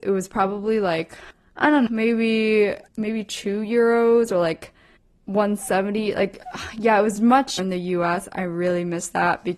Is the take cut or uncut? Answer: cut